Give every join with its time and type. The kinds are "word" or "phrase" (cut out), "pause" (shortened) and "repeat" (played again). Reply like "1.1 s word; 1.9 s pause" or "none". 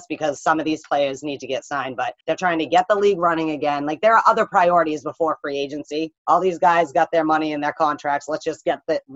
2.2 s pause; 6.2 s pause